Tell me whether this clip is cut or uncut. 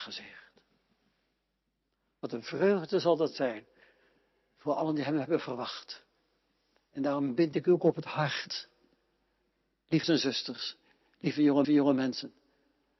cut